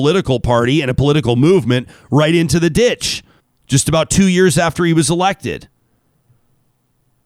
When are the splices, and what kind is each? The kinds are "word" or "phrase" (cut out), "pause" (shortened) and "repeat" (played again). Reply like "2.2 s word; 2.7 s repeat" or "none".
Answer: 3.4 s pause